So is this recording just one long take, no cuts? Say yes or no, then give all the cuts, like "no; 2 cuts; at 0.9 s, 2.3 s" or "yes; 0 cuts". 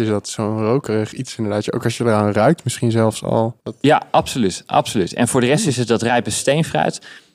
no; 1 cut; at 3.6 s